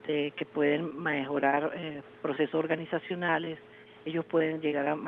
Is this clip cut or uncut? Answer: uncut